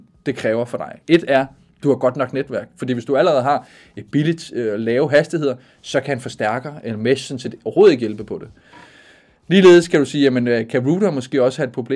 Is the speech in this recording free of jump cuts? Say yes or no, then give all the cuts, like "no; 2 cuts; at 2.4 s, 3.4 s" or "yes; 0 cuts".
yes; 0 cuts